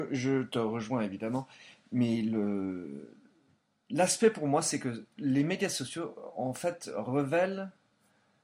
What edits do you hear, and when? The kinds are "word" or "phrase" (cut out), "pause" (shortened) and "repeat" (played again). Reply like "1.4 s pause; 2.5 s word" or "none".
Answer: none